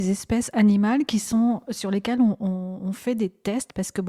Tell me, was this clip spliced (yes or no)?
no